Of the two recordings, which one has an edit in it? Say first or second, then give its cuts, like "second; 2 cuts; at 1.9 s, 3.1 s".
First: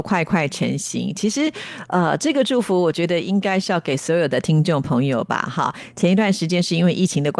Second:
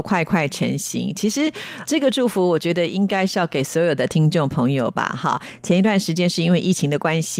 second; 1 cut; at 1.9 s